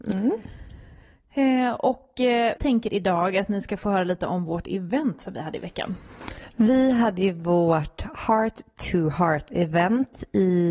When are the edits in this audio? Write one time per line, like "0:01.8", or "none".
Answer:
0:02.6